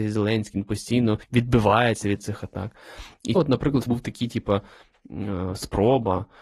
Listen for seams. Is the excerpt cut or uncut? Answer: cut